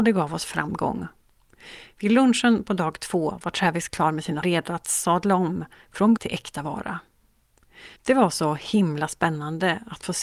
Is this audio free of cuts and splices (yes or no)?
no